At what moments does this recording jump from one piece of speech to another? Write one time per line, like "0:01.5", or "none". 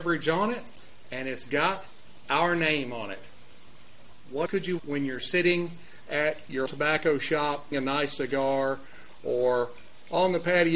0:04.5
0:04.8
0:06.7
0:07.7

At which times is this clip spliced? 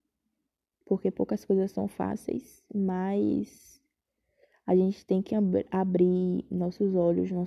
none

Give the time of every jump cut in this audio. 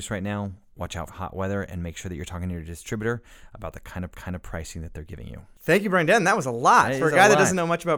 0:01.1
0:04.1
0:05.6

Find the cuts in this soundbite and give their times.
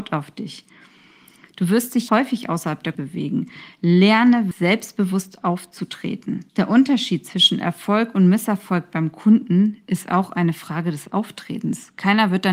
0:02.1
0:02.9
0:04.5
0:06.5

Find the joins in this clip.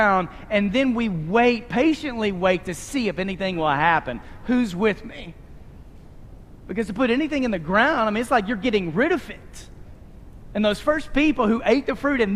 none

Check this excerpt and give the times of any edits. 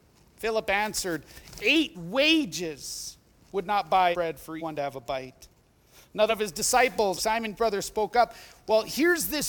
0:01.9
0:04.1
0:04.6
0:06.3
0:07.2
0:07.6

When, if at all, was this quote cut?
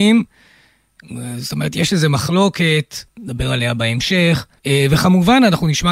0:04.6

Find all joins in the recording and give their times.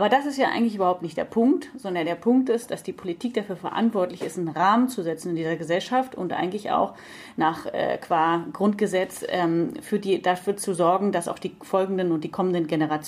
none

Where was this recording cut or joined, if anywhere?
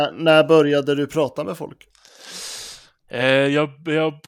none

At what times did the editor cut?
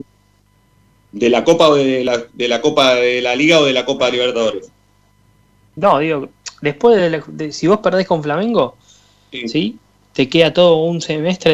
none

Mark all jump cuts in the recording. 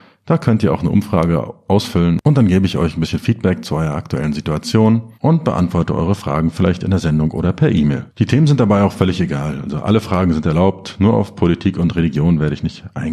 0:05.1
0:08.1

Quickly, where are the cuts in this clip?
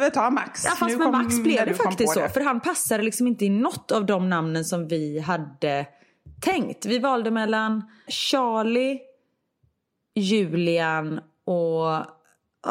0:08.1

